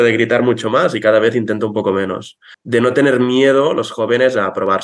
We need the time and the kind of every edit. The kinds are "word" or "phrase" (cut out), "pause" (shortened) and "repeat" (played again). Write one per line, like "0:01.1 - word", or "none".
none